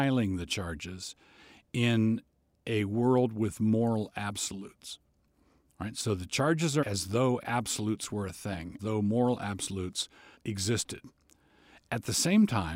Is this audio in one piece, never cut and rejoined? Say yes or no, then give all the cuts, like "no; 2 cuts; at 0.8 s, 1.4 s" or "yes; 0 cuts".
no; 3 cuts; at 6.8 s, 8.8 s, 10.3 s